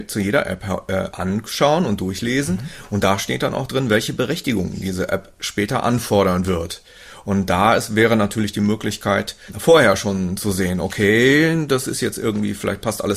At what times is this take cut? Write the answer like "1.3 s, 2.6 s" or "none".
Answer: none